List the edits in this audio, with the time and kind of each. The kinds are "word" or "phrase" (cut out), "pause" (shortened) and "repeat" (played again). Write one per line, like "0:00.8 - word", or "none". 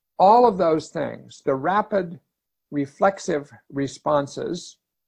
none